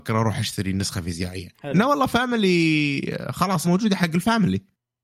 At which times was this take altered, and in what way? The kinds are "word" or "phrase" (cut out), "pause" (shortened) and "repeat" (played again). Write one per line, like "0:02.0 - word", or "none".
0:01.5 - pause
0:03.6 - word